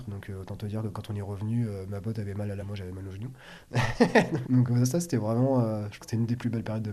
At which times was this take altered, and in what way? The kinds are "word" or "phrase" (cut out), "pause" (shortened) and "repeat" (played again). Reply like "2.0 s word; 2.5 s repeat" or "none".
2.6 s word; 4.4 s word; 6.0 s word